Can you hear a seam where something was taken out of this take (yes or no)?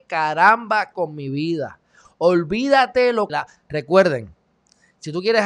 yes